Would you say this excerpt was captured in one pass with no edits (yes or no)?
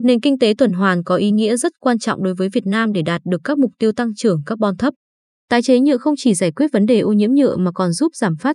yes